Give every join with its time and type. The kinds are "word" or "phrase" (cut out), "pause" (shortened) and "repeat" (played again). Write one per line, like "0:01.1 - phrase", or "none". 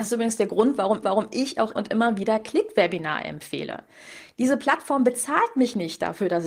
0:01.0 - repeat
0:01.7 - word